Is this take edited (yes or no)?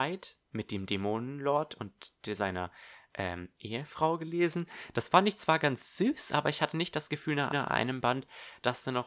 yes